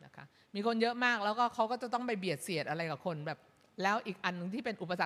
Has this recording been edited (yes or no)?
no